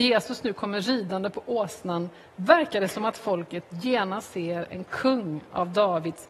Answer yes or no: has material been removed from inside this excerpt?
no